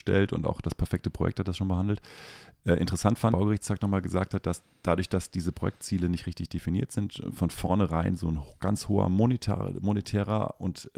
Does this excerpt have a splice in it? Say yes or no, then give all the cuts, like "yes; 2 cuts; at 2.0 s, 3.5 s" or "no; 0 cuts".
yes; 1 cut; at 3.3 s